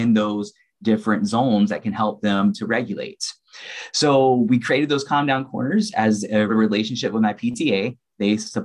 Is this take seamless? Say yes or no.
no